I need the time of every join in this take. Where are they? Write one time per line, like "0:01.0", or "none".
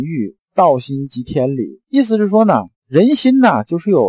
0:01.9
0:02.8